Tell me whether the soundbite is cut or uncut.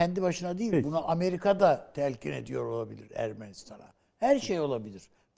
uncut